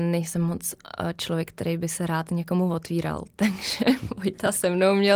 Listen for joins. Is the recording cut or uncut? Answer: uncut